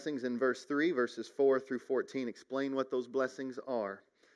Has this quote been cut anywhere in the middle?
no; 0 cuts

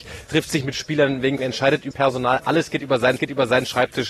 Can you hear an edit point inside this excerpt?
yes; 3 cuts; at 1.4 s, 1.9 s, 3.2 s

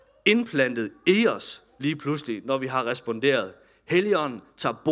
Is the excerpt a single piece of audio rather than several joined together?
yes; 0 cuts

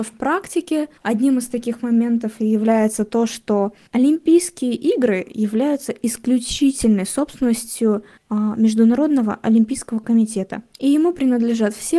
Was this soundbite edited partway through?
yes; 3 cuts; at 1.0 s, 8.2 s, 10.7 s

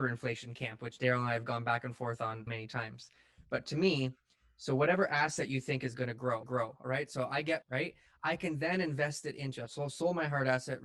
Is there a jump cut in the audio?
yes; 3 cuts; at 2.5 s, 6.4 s, 7.6 s

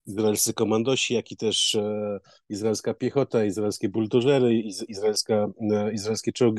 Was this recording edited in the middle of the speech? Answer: no; 0 cuts

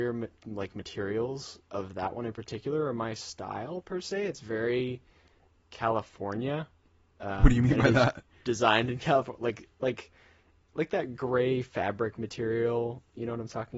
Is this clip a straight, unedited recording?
yes; 0 cuts

